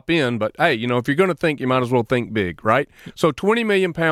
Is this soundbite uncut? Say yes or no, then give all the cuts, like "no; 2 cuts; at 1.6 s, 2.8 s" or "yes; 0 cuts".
yes; 0 cuts